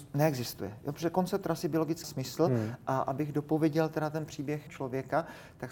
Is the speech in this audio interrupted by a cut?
yes; 2 cuts; at 2.0 s, 4.7 s

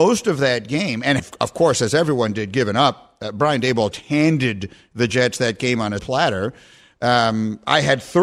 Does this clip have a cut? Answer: yes; 3 cuts; at 1.2 s, 3.9 s, 6.0 s

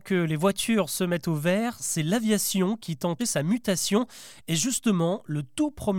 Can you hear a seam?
yes; 1 cut; at 3.2 s

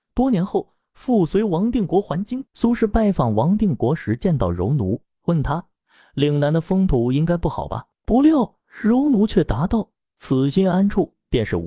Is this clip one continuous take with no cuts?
no; 1 cut; at 2.5 s

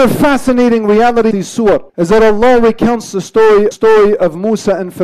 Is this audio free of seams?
no; 3 cuts; at 1.3 s, 1.9 s, 3.7 s

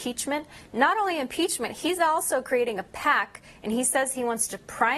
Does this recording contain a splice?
no; 0 cuts

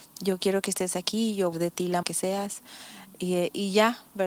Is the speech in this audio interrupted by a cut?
yes; 2 cuts; at 1.5 s, 2.0 s

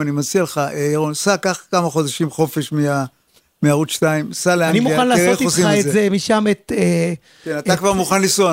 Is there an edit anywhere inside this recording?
no; 0 cuts

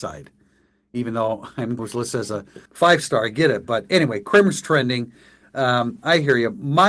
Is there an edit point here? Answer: yes; 2 cuts; at 1.8 s, 2.7 s

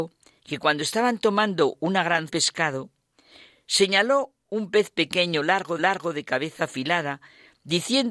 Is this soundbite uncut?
no; 2 cuts; at 2.3 s, 5.8 s

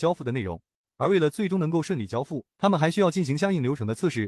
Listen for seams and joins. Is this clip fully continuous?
no; 1 cut; at 2.5 s

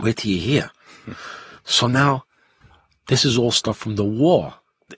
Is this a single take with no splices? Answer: yes; 0 cuts

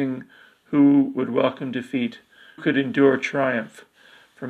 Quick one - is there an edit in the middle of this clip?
yes; 1 cut; at 2.6 s

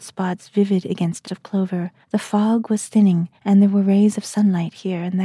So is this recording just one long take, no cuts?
no; 3 cuts; at 1.2 s, 2.0 s, 3.4 s

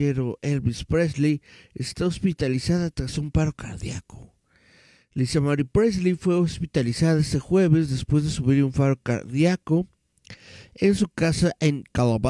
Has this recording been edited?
no; 0 cuts

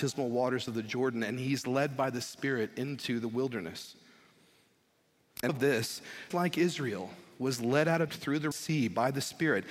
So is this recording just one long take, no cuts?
no; 4 cuts; at 5.5 s, 6.3 s, 8.1 s, 8.5 s

